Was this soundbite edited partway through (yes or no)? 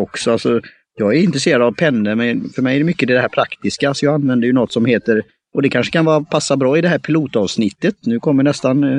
no